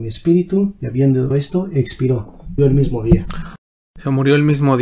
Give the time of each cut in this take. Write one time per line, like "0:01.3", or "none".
0:01.3
0:02.6